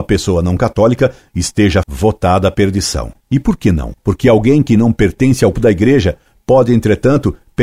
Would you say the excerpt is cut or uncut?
cut